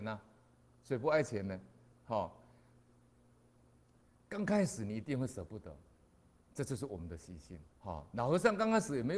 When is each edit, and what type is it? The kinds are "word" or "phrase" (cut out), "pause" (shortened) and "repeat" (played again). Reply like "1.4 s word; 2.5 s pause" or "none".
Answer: 7.7 s pause